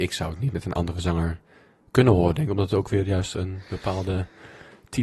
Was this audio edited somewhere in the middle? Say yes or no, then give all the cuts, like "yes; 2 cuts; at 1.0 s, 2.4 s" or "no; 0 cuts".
no; 0 cuts